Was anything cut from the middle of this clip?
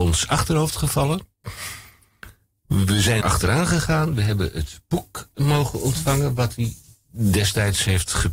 yes; 1 cut; at 3.2 s

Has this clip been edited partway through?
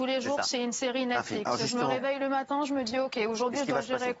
no; 0 cuts

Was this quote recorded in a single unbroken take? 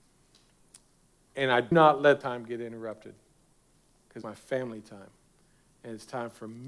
no; 3 cuts; at 1.7 s, 2.2 s, 4.2 s

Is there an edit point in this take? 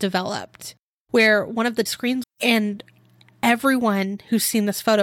yes; 2 cuts; at 1.9 s, 2.2 s

